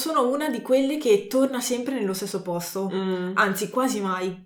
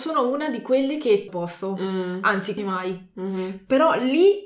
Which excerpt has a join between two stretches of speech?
second; 2 cuts; at 1.3 s, 2.6 s

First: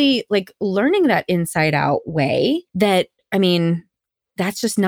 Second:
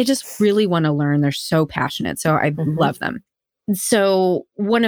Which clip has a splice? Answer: first; 1 cut; at 2.7 s

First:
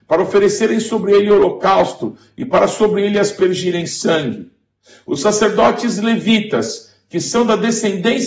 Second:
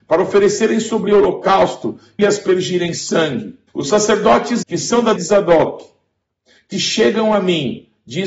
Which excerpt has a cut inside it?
second; 6 cuts; at 1.1 s, 2.2 s, 3.7 s, 4.6 s, 5.2 s, 6.7 s

